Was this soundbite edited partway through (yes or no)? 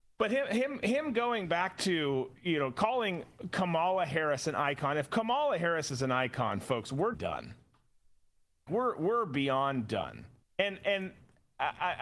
yes